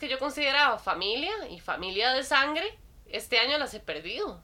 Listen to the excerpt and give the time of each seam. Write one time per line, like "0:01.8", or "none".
none